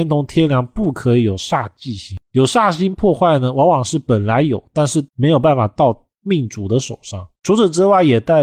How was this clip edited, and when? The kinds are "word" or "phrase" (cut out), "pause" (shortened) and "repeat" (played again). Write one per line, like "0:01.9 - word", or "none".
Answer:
0:05.1 - pause
0:07.4 - pause